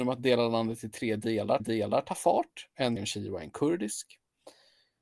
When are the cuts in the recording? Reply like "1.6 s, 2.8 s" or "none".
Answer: 1.6 s, 3.0 s